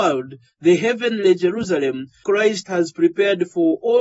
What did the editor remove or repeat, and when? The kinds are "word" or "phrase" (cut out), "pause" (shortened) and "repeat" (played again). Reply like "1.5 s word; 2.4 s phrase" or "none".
2.2 s word